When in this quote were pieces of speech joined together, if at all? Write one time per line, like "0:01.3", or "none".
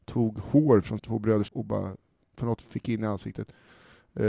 0:01.0
0:01.5
0:02.6